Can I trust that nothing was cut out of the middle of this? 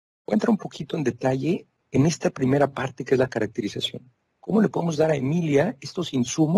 yes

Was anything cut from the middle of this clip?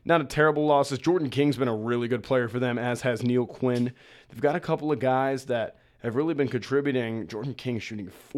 no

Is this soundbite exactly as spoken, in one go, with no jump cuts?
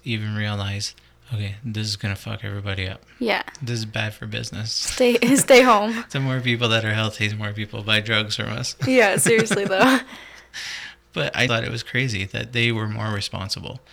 no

